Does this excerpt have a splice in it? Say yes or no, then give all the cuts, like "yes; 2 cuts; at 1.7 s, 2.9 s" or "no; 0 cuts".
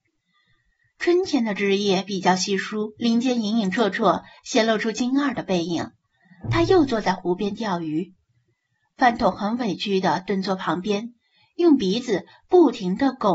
yes; 1 cut; at 3.0 s